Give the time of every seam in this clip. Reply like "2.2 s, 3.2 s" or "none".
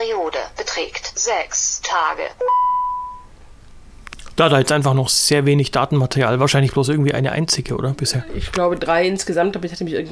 none